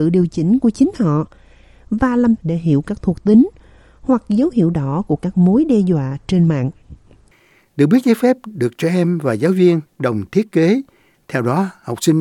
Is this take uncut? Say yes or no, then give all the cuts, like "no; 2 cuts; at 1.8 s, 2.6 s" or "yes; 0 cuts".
no; 1 cut; at 2.4 s